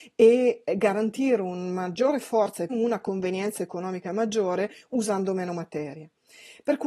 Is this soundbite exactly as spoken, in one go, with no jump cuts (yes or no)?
no